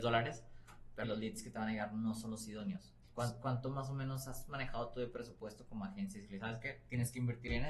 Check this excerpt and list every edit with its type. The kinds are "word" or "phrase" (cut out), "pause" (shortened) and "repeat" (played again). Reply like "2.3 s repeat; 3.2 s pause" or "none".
1.0 s word; 3.0 s pause